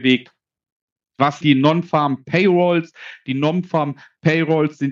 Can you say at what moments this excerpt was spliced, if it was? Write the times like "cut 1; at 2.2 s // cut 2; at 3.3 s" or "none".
cut 1; at 1.4 s